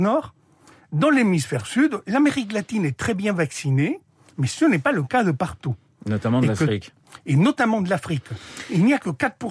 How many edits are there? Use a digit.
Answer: 0